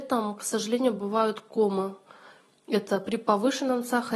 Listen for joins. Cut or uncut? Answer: uncut